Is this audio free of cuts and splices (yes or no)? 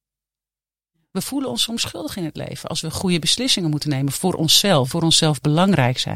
no